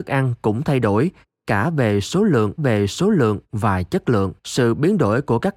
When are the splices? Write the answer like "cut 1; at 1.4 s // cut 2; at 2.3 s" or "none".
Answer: cut 1; at 2.6 s // cut 2; at 4.4 s